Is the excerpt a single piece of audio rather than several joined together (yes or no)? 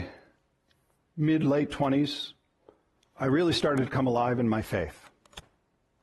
yes